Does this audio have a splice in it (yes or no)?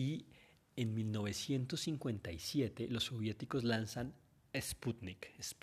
no